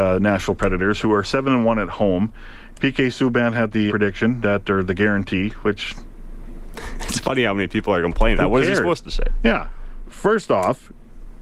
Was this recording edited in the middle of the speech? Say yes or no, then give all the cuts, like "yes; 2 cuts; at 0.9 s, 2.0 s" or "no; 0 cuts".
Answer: yes; 2 cuts; at 3.9 s, 8.4 s